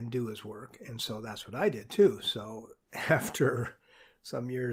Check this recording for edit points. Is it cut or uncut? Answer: uncut